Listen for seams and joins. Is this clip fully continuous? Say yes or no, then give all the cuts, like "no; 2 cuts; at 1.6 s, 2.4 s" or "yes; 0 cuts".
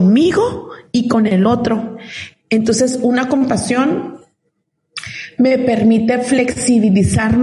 yes; 0 cuts